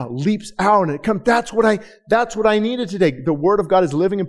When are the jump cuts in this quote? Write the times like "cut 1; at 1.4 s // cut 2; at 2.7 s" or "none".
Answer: none